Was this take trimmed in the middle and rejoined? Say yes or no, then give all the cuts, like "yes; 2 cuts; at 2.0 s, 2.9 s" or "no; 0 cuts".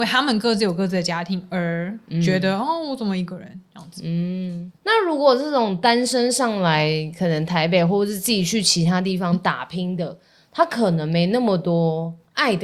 no; 0 cuts